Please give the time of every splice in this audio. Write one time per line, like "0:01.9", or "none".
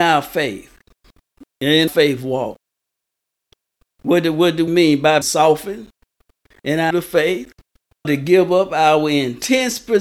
0:01.9
0:04.7
0:05.2
0:06.9
0:08.0